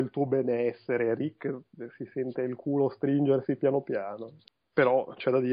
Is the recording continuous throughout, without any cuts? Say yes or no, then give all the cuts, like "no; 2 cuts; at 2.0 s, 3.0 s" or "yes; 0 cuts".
yes; 0 cuts